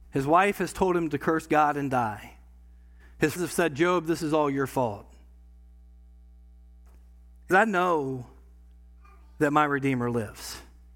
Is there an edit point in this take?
yes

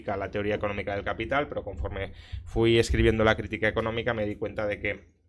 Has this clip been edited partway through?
no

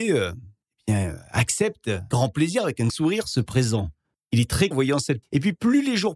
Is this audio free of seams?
no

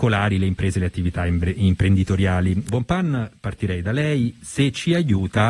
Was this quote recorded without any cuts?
no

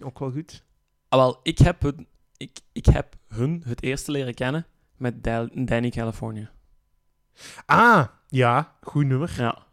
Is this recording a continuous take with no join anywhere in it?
yes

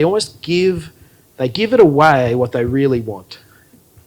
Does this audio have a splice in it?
no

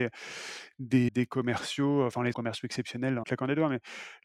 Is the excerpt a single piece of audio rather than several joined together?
no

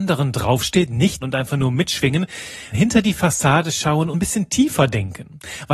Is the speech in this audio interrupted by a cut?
yes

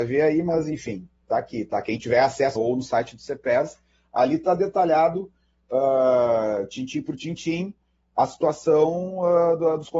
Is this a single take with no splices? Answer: no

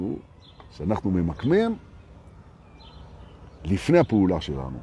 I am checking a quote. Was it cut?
no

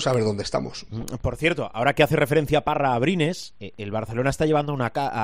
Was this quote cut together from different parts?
no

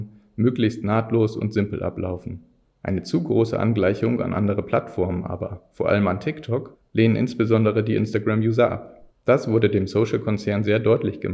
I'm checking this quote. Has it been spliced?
no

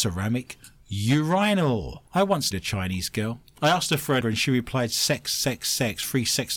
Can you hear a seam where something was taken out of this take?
yes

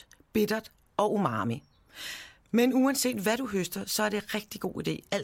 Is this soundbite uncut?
yes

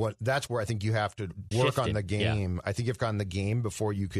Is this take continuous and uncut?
no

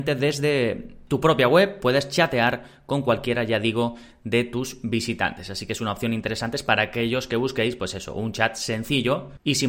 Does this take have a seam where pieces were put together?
no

